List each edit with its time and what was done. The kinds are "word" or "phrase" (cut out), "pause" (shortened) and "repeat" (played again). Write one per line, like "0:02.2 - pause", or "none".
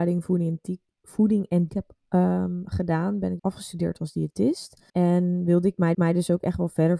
0:01.7 - word
0:03.4 - word
0:04.9 - pause
0:05.9 - repeat